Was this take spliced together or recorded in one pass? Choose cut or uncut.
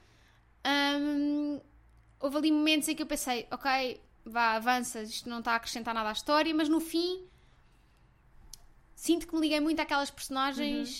uncut